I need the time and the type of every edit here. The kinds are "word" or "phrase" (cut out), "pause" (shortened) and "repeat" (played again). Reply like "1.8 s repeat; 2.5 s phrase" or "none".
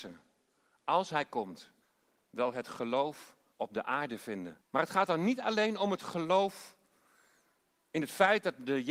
1.8 s pause; 3.5 s pause; 4.6 s pause